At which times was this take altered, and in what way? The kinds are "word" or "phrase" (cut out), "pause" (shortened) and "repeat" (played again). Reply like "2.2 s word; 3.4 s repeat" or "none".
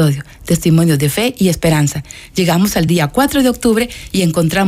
none